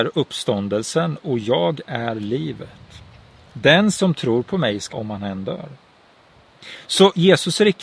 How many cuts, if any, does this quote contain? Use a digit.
1